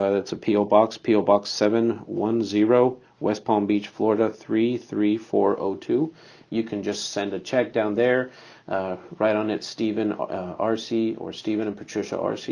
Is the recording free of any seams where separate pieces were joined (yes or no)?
yes